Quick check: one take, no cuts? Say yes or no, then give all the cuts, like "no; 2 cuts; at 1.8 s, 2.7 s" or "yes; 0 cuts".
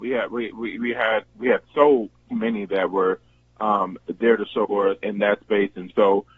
no; 4 cuts; at 1.2 s, 2.3 s, 4.6 s, 5.0 s